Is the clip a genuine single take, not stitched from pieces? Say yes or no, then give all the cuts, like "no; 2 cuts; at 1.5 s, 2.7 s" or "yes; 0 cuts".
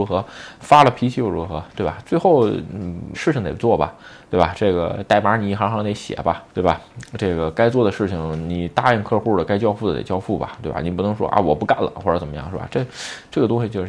no; 2 cuts; at 3.1 s, 6.5 s